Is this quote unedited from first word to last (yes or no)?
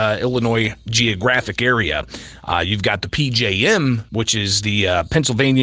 no